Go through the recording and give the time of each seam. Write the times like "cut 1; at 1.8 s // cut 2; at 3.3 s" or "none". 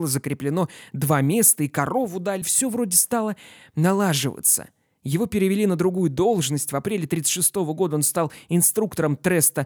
cut 1; at 2.4 s